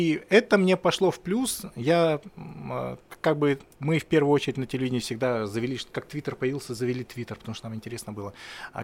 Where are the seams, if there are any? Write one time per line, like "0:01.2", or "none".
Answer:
0:03.7